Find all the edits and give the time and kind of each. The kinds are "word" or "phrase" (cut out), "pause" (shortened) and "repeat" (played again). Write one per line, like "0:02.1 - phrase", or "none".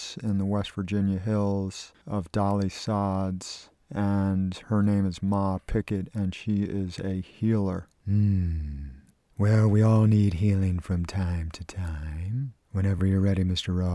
none